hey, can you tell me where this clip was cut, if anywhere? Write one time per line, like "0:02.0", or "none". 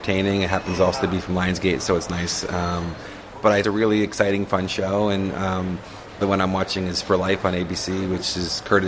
0:03.6
0:06.2